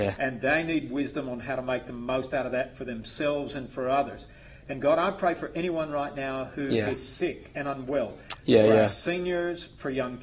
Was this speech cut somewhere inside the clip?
no; 0 cuts

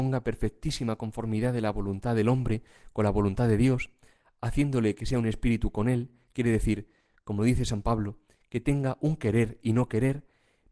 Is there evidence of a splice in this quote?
no; 0 cuts

